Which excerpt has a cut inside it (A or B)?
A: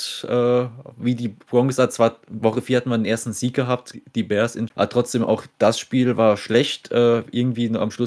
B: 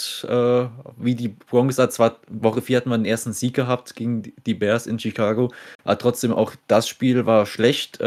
A